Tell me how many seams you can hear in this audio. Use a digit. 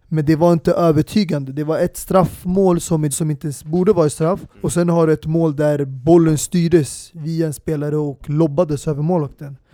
2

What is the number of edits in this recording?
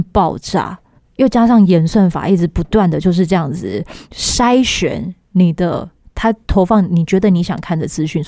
1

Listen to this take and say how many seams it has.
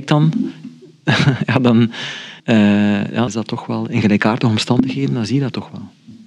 2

